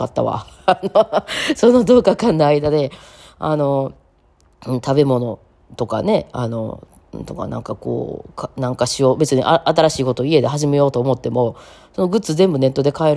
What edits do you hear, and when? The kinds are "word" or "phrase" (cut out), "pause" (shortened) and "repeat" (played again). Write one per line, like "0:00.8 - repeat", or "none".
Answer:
none